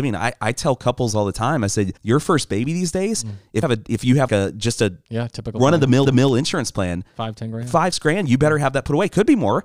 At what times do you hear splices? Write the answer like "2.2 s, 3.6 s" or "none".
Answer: 2.0 s, 3.6 s, 4.3 s, 6.0 s, 7.9 s